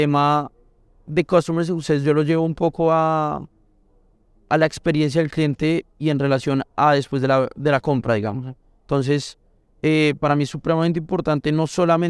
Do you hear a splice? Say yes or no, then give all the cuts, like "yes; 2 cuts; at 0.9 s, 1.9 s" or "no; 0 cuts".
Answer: no; 0 cuts